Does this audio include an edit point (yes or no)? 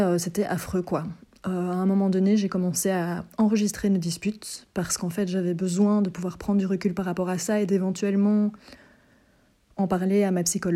no